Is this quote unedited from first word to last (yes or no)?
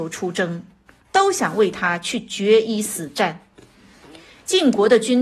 yes